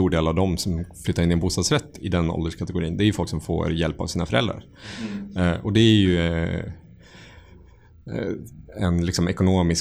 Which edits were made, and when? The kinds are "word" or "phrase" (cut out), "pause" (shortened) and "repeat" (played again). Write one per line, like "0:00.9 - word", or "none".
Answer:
none